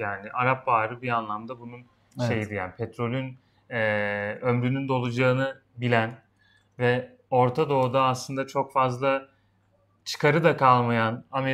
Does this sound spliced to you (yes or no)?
no